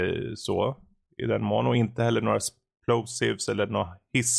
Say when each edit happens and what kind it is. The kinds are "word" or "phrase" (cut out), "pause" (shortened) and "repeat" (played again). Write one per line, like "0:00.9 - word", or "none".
none